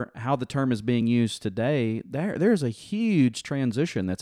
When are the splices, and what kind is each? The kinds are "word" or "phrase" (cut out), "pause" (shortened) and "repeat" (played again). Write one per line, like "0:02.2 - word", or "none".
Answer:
none